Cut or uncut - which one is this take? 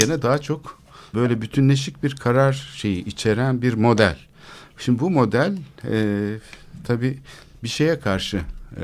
cut